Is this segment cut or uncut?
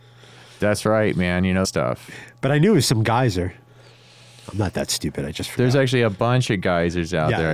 cut